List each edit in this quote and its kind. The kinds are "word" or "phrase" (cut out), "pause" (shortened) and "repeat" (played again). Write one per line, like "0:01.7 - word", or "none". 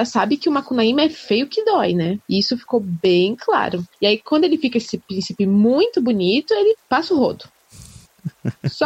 0:02.2 - pause